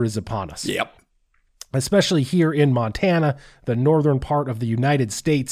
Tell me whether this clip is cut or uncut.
uncut